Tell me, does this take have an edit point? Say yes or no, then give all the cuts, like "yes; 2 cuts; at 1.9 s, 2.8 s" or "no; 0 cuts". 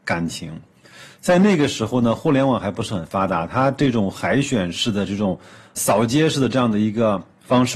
yes; 1 cut; at 5.7 s